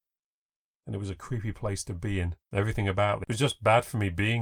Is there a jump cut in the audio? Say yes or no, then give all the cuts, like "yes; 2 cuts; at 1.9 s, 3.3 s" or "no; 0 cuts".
yes; 2 cuts; at 2.4 s, 3.2 s